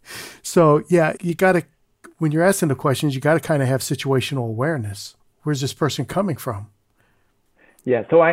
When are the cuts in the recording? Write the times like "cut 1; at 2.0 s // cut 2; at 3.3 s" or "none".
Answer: cut 1; at 1.2 s // cut 2; at 5.2 s